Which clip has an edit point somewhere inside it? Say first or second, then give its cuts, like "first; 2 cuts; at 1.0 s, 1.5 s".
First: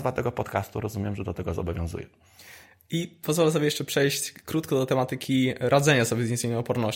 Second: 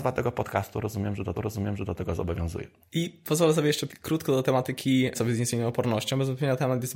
second; 4 cuts; at 1.3 s, 2.8 s, 3.9 s, 5.1 s